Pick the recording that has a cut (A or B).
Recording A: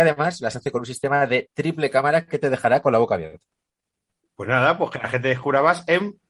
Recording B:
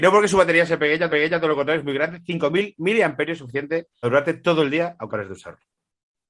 B